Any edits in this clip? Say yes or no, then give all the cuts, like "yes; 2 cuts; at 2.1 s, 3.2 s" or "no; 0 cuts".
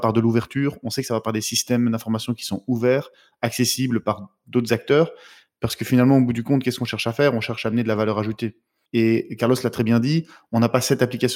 no; 0 cuts